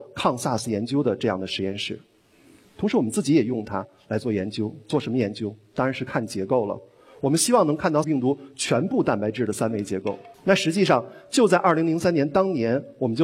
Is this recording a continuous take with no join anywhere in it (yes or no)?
no